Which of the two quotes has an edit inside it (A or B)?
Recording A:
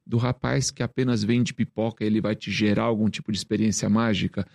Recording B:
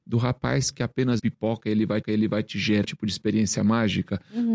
B